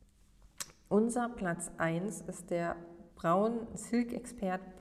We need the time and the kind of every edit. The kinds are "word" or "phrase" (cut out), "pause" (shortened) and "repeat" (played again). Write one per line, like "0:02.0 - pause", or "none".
0:03.1 - pause

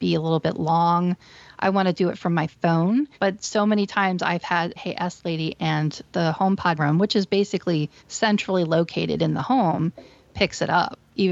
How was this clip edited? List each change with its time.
0:03.1 - pause
0:04.8 - phrase
0:06.8 - phrase
0:08.0 - pause

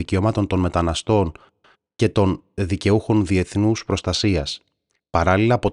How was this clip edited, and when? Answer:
none

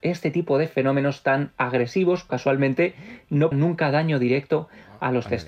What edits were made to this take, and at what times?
0:02.3 - phrase
0:03.5 - word

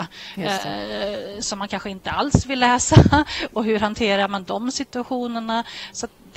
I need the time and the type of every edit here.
none

